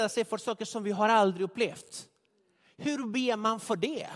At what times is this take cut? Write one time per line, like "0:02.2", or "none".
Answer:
none